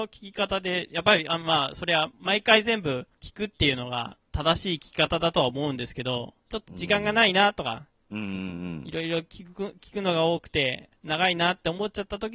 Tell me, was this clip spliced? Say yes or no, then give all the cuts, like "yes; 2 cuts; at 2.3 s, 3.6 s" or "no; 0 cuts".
yes; 5 cuts; at 2.1 s, 3.1 s, 4.2 s, 6.4 s, 11.0 s